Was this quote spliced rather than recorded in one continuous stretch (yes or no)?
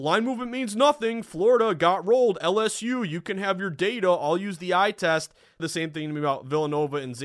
yes